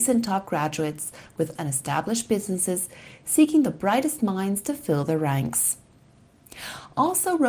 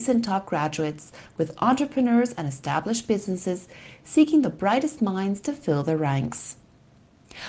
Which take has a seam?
first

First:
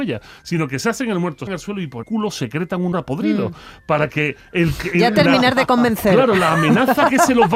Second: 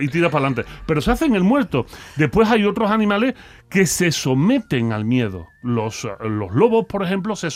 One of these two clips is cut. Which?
first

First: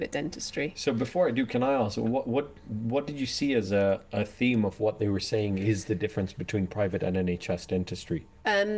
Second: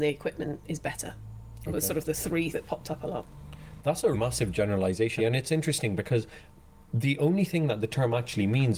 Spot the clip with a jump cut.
second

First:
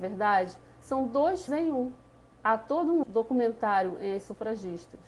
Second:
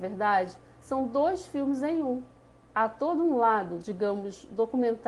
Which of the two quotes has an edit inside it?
first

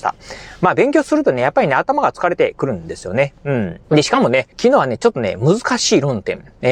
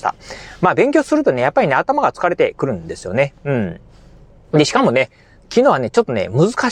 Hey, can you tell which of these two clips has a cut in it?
first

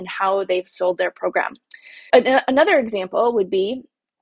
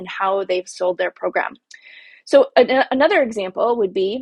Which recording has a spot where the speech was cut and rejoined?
first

